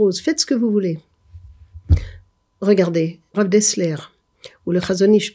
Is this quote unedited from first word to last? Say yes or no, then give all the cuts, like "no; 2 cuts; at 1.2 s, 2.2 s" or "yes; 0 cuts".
no; 1 cut; at 3.3 s